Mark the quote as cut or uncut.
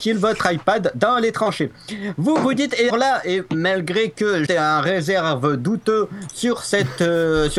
cut